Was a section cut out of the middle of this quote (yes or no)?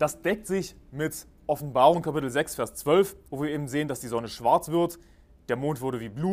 yes